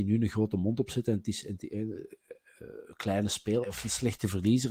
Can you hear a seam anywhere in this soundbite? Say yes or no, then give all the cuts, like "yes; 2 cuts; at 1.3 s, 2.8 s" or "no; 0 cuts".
yes; 1 cut; at 3.6 s